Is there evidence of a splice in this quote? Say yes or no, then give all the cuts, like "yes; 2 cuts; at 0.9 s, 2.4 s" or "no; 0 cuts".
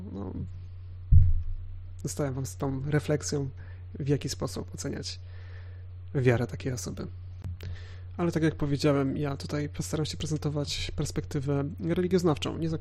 no; 0 cuts